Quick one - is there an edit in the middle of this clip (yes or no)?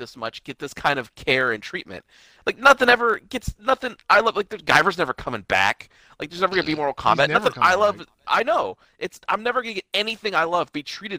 no